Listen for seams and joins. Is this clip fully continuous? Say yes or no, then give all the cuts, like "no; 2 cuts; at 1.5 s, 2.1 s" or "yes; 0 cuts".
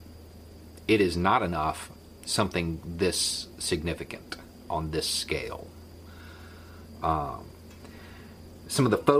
no; 1 cut; at 2.2 s